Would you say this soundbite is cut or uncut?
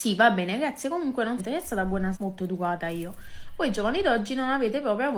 cut